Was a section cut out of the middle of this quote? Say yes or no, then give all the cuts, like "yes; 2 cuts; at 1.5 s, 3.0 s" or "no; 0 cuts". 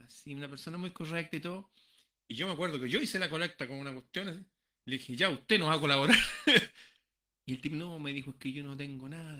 no; 0 cuts